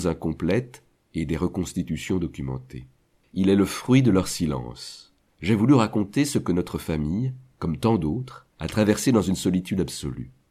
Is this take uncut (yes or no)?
no